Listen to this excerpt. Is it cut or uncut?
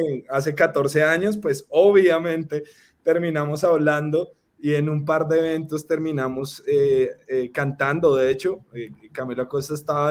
uncut